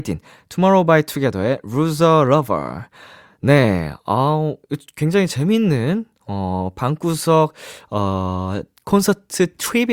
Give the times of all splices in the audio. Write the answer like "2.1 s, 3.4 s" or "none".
none